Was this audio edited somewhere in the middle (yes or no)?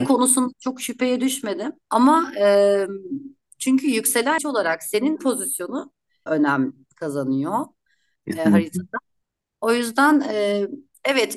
yes